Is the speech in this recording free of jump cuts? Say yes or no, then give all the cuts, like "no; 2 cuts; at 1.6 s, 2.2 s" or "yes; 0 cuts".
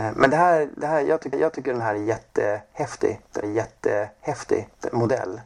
no; 2 cuts; at 1.3 s, 3.4 s